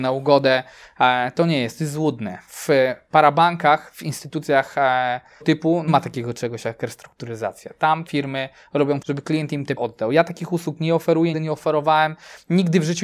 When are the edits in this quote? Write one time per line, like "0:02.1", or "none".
0:05.4
0:05.9
0:08.1
0:09.0
0:09.8
0:11.3